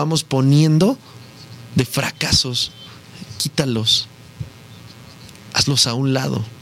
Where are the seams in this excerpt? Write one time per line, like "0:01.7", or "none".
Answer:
none